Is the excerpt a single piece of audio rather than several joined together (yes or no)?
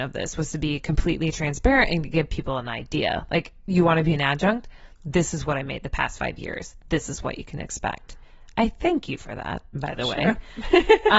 yes